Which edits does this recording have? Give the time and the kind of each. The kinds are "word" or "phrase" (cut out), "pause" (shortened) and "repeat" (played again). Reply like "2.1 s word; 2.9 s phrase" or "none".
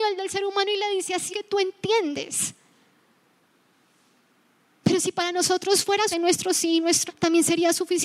1.3 s word; 6.1 s word; 7.1 s word